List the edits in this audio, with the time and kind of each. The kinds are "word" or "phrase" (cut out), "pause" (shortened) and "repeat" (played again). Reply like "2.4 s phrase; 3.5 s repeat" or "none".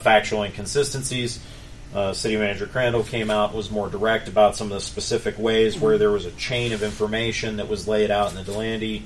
none